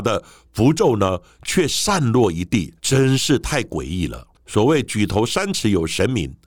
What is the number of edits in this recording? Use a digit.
2